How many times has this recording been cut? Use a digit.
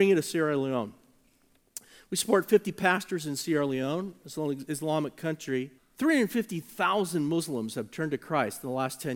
1